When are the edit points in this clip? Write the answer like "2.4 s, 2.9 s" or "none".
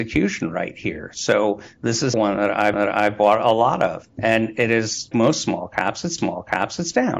2.1 s, 2.7 s, 4.1 s, 5.1 s, 6.2 s